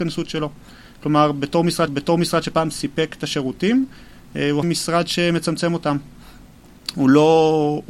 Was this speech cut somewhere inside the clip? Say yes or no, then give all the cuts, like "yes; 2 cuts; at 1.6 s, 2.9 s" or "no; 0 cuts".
yes; 2 cuts; at 1.9 s, 4.6 s